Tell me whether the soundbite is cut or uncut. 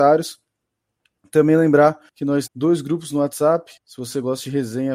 cut